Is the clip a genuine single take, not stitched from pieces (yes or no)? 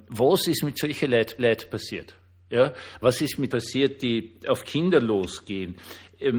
no